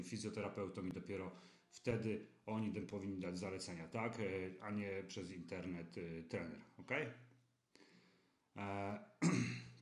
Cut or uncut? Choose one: uncut